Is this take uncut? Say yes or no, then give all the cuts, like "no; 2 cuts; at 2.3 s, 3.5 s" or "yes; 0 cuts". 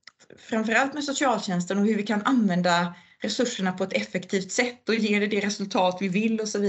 yes; 0 cuts